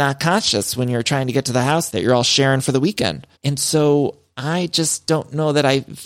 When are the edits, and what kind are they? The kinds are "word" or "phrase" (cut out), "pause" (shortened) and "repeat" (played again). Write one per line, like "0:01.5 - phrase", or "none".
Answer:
0:03.4 - pause